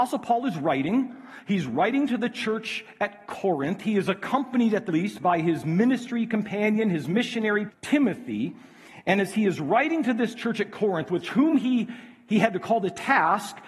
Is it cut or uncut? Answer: cut